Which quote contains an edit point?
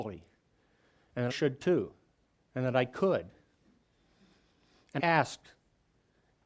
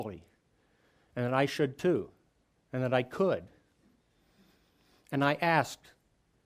first; 2 cuts; at 1.3 s, 5.0 s

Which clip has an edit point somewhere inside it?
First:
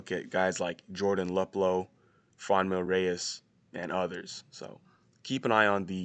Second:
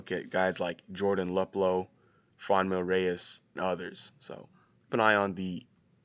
second; 2 cuts; at 3.5 s, 4.9 s

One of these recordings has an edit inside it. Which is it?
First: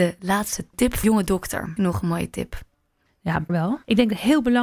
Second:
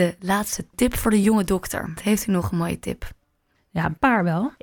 first; 3 cuts; at 1.0 s, 1.8 s, 3.5 s

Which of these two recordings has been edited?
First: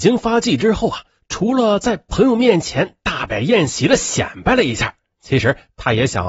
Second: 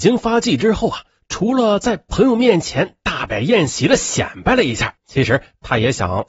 second; 1 cut; at 5.0 s

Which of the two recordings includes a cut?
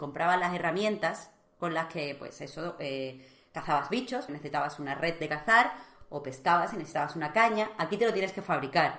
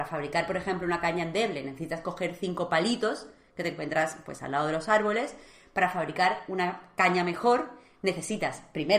first; 1 cut; at 4.3 s

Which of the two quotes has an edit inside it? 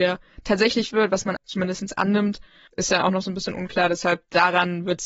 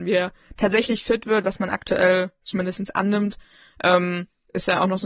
first; 3 cuts; at 0.9 s, 1.4 s, 2.7 s

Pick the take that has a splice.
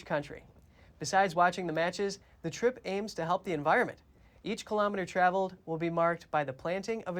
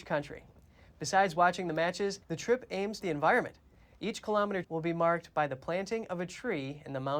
second; 3 cuts; at 2.2 s, 3.0 s, 4.6 s

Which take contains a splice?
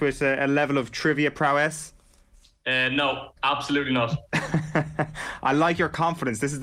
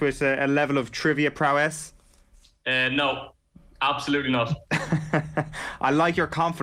first; 1 cut; at 3.4 s

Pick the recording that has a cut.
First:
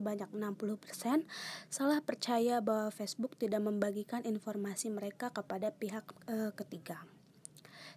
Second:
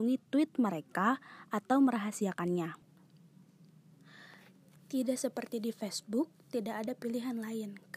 first; 1 cut; at 6.2 s

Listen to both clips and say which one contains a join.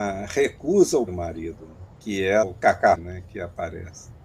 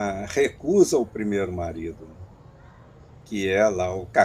first; 4 cuts; at 1.1 s, 1.9 s, 2.4 s, 2.9 s

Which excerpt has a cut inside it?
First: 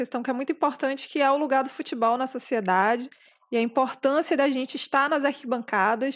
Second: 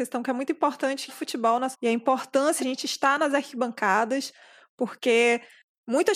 second; 3 cuts; at 1.1 s, 1.7 s, 2.6 s

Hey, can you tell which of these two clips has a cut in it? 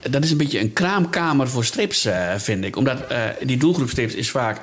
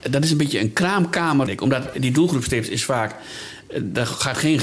second; 2 cuts; at 1.5 s, 1.9 s

